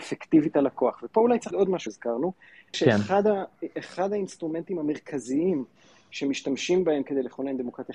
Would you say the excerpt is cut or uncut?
cut